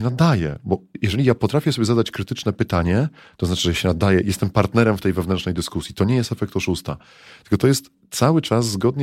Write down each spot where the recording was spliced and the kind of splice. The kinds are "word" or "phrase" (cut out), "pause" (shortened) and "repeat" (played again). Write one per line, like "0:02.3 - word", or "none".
none